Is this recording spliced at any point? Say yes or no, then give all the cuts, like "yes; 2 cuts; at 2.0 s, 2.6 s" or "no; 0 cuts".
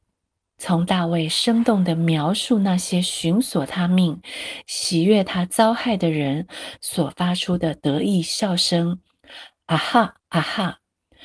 yes; 1 cut; at 10.2 s